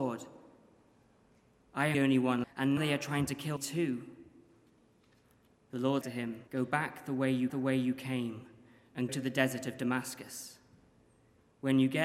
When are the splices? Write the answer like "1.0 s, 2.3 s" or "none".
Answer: 1.9 s, 2.4 s, 2.8 s, 3.6 s, 6.0 s, 6.5 s, 7.5 s, 9.1 s